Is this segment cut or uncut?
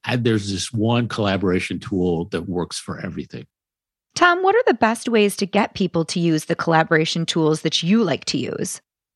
uncut